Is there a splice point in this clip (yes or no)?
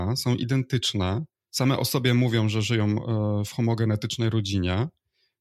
no